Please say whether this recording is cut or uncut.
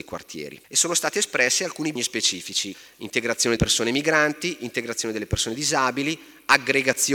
cut